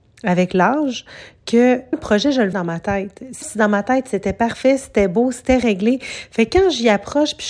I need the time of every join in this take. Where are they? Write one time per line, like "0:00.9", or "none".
0:01.9
0:02.5
0:03.4

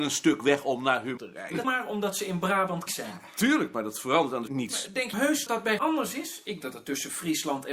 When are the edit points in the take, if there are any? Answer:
0:01.2
0:01.6
0:02.9
0:04.5
0:05.1
0:05.5
0:05.8
0:06.6

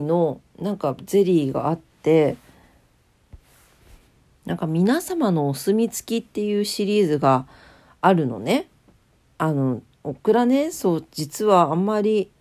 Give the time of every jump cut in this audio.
none

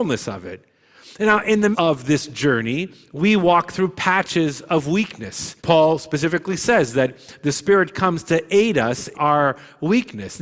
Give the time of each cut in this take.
0:01.7
0:05.6
0:09.1

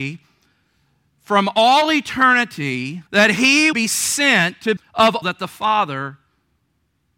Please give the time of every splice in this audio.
0:03.1
0:03.7
0:04.8
0:05.2

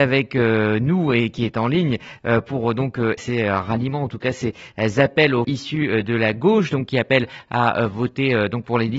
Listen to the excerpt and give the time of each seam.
0:03.2
0:05.4

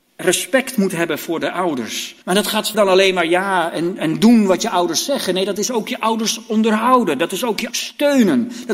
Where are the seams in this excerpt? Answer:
0:02.2
0:02.7
0:07.7

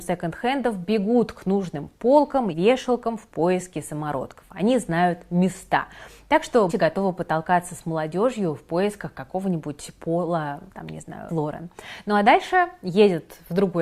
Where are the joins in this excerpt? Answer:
0:02.5
0:06.7
0:10.7
0:11.3

